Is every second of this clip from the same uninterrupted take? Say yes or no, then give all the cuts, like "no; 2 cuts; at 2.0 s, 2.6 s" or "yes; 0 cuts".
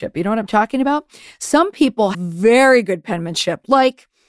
no; 1 cut; at 2.1 s